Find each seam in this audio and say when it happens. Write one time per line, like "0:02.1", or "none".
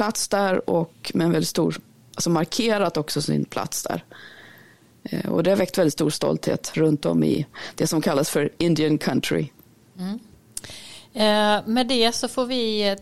none